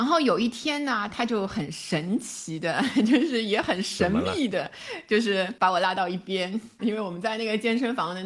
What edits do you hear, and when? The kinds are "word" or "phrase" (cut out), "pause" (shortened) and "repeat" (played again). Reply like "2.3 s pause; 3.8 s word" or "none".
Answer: 6.8 s phrase